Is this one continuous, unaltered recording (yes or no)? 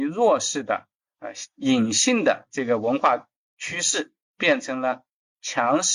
no